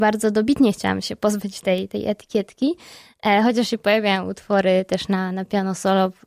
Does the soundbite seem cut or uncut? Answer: uncut